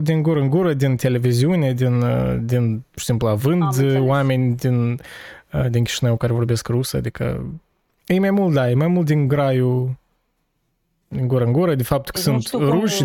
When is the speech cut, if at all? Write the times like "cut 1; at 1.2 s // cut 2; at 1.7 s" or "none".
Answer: none